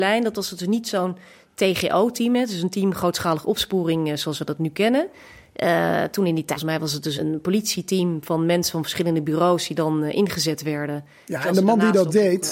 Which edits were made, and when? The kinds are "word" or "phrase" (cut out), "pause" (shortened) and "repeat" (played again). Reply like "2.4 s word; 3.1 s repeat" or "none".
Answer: 6.6 s word; 7.2 s word